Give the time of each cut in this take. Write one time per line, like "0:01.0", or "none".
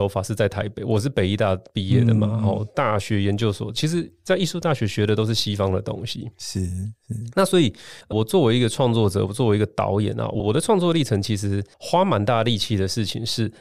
0:08.0
0:11.7